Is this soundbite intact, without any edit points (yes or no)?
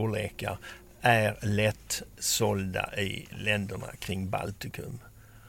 yes